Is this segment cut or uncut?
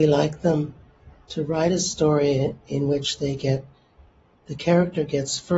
uncut